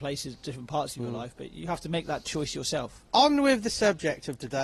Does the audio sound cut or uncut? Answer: cut